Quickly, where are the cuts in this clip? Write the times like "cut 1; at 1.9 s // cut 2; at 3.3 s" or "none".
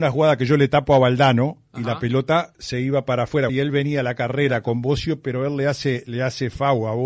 cut 1; at 3.5 s